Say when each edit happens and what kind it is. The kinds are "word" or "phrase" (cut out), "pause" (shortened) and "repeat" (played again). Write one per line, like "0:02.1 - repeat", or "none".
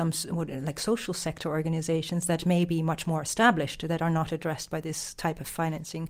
none